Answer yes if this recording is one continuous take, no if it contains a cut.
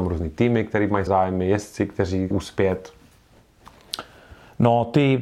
no